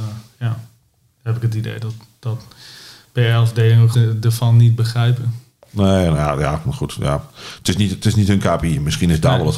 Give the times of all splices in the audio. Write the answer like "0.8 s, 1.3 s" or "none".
3.9 s